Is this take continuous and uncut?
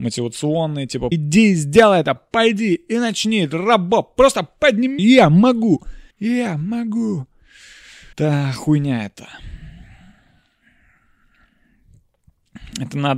no; 5 cuts; at 1.1 s, 2.2 s, 5.0 s, 6.1 s, 8.1 s

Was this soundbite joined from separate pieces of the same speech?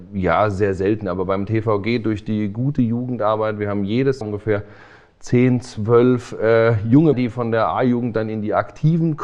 yes; 2 cuts; at 4.2 s, 7.1 s

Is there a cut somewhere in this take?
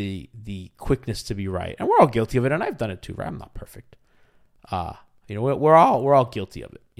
no; 0 cuts

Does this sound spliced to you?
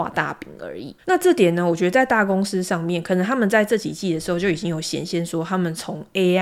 yes; 1 cut; at 1.0 s

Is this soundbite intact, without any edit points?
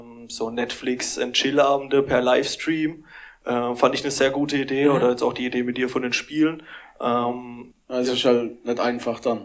yes; 0 cuts

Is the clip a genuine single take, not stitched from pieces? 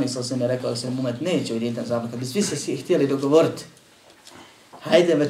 yes; 0 cuts

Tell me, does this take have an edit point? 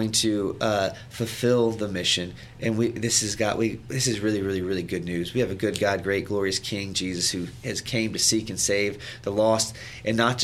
no; 0 cuts

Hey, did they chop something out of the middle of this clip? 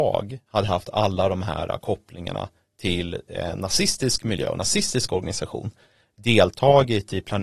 no; 0 cuts

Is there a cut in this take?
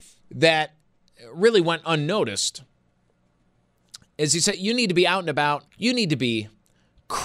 yes; 1 cut; at 5.7 s

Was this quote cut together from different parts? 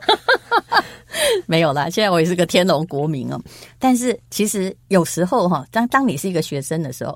yes; 2 cuts; at 4.2 s, 4.8 s

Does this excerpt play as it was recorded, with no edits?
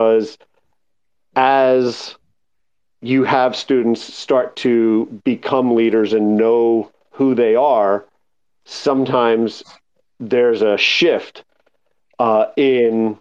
yes; 0 cuts

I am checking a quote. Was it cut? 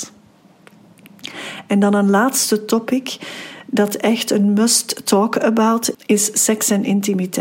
yes; 1 cut; at 5.9 s

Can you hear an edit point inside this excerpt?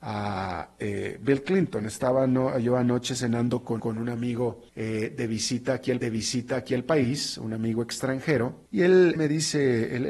yes; 5 cuts; at 3.8 s, 4.7 s, 6.0 s, 8.7 s, 9.2 s

